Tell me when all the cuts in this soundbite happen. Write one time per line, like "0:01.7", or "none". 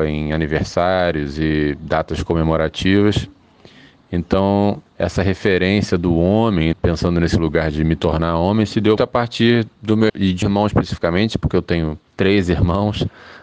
0:04.9
0:06.7
0:09.0
0:10.1
0:10.4
0:12.1